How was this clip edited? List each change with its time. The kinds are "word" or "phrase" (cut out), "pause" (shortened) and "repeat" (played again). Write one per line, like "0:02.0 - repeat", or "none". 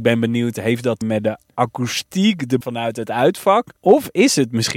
0:01.0 - word
0:02.6 - word
0:03.8 - pause